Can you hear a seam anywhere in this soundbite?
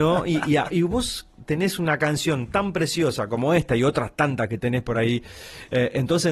no; 0 cuts

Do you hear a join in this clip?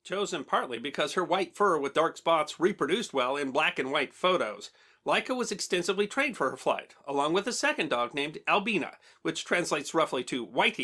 no; 0 cuts

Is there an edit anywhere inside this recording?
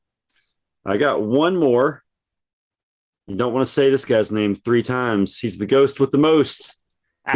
no; 0 cuts

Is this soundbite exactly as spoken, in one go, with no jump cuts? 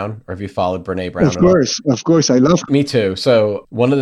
no; 1 cut; at 2.7 s

